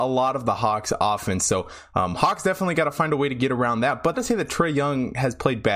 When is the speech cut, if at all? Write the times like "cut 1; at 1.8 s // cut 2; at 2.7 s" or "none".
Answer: cut 1; at 4.1 s